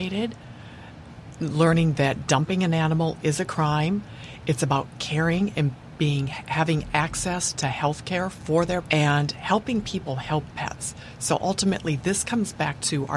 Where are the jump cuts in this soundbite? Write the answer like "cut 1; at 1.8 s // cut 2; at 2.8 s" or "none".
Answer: cut 1; at 8.8 s // cut 2; at 10.5 s